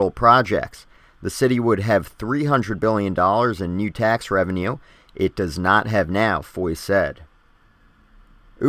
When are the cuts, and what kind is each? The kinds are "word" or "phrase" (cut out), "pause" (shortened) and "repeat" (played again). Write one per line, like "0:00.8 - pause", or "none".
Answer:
none